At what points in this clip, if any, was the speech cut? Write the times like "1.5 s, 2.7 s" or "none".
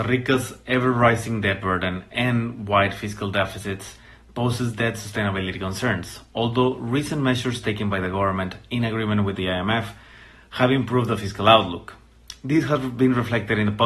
none